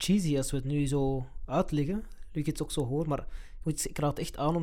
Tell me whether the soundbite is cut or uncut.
uncut